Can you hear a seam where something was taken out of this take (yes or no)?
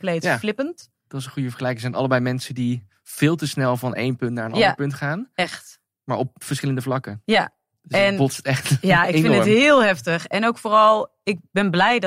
no